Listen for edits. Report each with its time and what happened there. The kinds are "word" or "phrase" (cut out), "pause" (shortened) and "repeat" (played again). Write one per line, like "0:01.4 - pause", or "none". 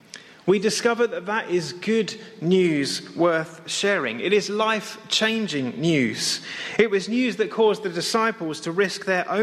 none